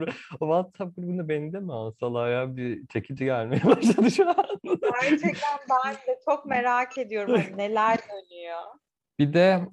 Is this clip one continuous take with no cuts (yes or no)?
yes